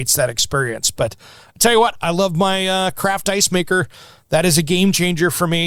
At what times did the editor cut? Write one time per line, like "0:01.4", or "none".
none